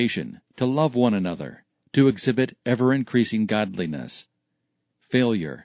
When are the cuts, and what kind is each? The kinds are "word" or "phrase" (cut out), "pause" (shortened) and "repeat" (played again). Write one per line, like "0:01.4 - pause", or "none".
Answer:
none